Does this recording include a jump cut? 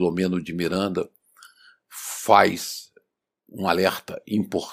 no; 0 cuts

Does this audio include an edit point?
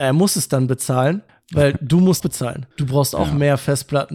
yes; 3 cuts; at 1.3 s, 2.2 s, 2.7 s

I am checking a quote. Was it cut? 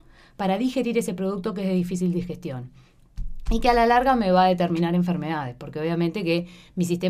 no; 0 cuts

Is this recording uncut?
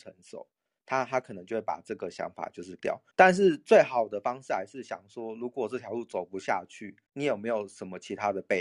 no; 3 cuts; at 2.8 s, 3.1 s, 7.1 s

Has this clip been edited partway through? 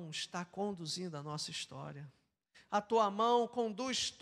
no; 0 cuts

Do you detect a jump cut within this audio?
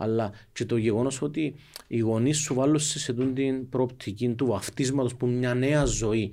no; 0 cuts

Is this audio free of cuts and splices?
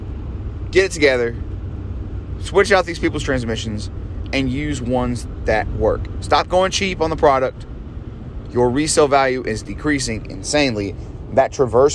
yes; 0 cuts

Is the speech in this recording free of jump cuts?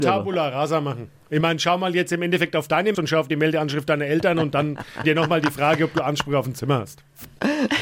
no; 2 cuts; at 2.9 s, 5.0 s

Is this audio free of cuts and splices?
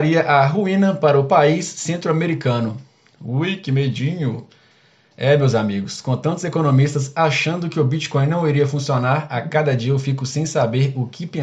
yes; 0 cuts

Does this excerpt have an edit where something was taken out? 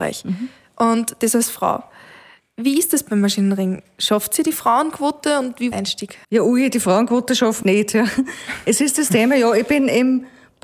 yes; 3 cuts; at 5.7 s, 6.2 s, 7.6 s

